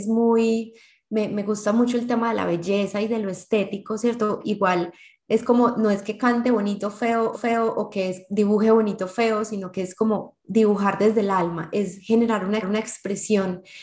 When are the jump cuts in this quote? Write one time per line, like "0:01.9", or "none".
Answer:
0:07.3
0:12.6